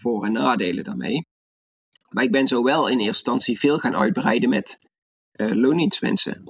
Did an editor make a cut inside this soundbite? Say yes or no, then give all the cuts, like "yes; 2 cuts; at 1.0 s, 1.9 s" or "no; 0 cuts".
no; 0 cuts